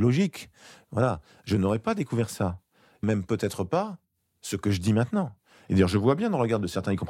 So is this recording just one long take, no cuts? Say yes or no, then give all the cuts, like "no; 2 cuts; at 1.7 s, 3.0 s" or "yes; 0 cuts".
no; 1 cut; at 3.0 s